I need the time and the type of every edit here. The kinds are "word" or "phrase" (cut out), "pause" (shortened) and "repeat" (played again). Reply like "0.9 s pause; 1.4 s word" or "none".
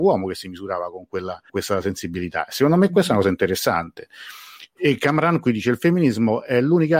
1.5 s word